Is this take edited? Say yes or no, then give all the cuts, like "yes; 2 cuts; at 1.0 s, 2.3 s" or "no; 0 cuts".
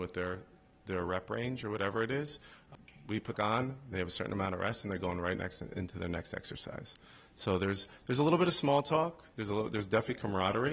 yes; 1 cut; at 3.3 s